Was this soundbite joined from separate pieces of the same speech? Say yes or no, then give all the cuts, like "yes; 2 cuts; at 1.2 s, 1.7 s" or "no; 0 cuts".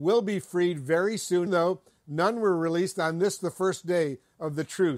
yes; 1 cut; at 1.5 s